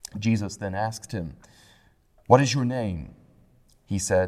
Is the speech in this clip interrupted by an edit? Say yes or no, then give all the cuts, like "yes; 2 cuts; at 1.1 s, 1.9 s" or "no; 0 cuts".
no; 0 cuts